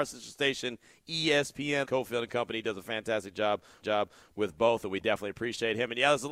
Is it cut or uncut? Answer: cut